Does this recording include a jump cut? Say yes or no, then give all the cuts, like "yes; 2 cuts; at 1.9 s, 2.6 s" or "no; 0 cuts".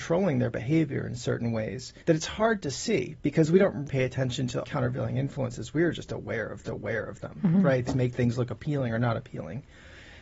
yes; 5 cuts; at 2.0 s, 3.9 s, 4.6 s, 6.6 s, 7.9 s